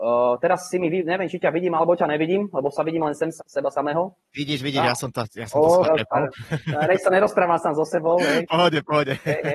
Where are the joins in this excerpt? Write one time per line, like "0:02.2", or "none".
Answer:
0:03.4
0:04.6
0:05.8